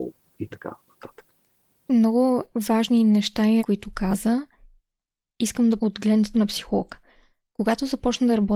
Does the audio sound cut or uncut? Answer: cut